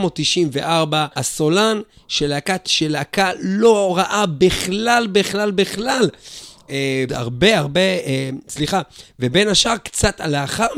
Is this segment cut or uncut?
cut